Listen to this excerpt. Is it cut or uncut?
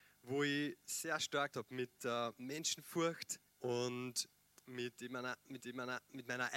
cut